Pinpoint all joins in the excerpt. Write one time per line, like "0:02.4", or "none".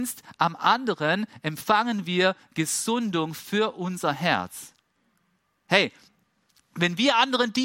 none